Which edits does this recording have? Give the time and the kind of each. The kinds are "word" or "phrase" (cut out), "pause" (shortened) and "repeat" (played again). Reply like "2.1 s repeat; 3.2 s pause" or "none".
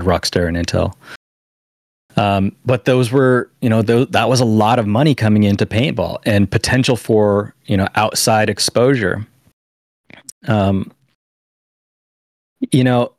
none